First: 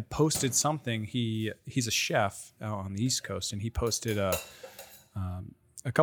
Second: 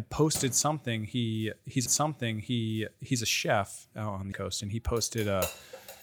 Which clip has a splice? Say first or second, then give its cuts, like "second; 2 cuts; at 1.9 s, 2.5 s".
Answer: second; 2 cuts; at 1.9 s, 4.3 s